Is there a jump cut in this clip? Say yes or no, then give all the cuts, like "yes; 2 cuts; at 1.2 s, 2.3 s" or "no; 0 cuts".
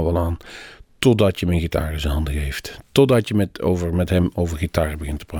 no; 0 cuts